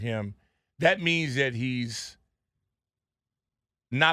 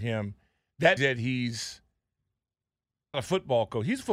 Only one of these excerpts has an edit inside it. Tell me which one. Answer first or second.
second